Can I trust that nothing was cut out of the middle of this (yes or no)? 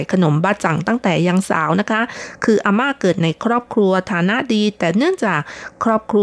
yes